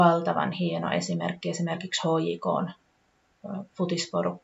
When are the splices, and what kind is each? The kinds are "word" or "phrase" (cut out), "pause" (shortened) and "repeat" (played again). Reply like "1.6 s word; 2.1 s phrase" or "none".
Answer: none